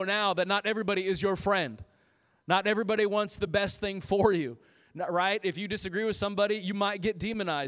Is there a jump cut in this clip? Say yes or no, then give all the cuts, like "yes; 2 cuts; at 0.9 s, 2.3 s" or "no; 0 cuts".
no; 0 cuts